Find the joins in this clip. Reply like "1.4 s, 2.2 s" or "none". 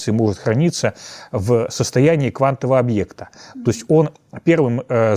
none